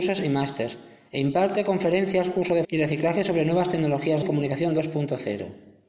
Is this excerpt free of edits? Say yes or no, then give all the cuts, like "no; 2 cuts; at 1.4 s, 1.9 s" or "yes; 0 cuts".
no; 2 cuts; at 2.6 s, 4.2 s